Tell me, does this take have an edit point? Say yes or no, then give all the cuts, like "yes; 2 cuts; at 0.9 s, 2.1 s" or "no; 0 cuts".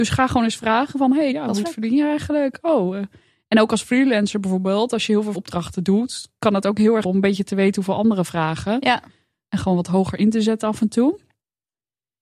yes; 4 cuts; at 1.3 s, 1.6 s, 5.3 s, 7.0 s